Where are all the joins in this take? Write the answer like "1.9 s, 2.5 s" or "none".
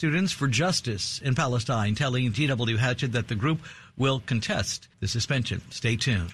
2.3 s, 4.9 s